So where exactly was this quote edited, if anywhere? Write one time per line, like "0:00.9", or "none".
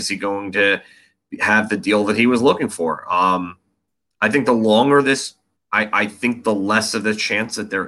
0:05.5